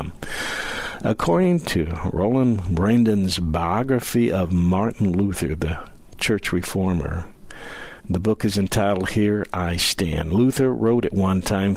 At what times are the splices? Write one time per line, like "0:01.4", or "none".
0:08.0